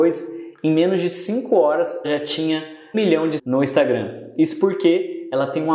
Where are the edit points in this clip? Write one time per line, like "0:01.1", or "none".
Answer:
0:02.0
0:02.9
0:03.4

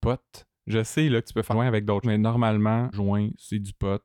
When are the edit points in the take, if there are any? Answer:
0:01.5
0:02.0
0:02.9

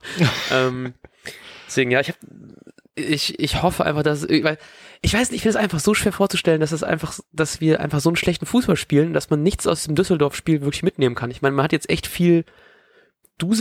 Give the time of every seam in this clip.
none

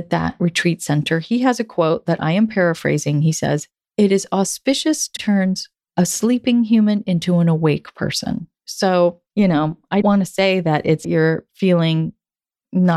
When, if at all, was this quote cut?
0:03.9
0:05.2
0:05.8
0:09.3
0:10.0
0:11.0

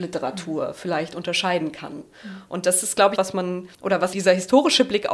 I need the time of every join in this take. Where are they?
0:03.2
0:03.7
0:04.1

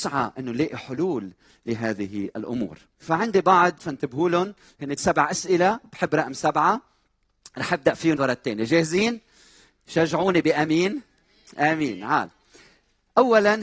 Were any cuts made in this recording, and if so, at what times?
0:03.0
0:03.8
0:05.0
0:08.2

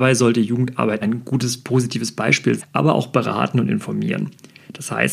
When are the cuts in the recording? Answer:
0:01.0
0:02.6

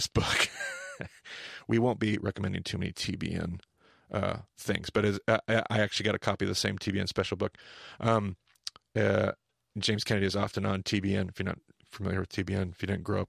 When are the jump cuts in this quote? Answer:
none

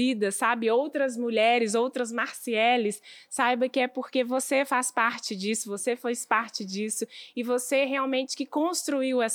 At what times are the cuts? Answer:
none

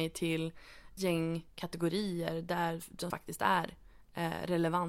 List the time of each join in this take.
0:01.0
0:03.1

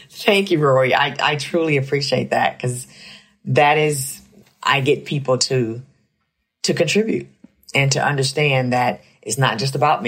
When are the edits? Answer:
0:04.4

